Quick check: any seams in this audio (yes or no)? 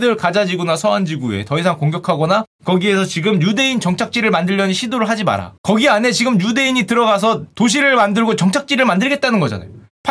yes